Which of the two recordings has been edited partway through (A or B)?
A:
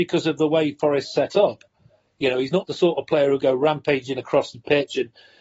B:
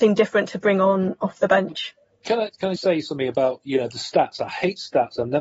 B